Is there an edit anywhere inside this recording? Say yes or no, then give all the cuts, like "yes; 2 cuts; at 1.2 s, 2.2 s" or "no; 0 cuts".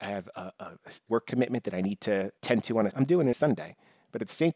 yes; 4 cuts; at 1.1 s, 2.4 s, 2.9 s, 3.3 s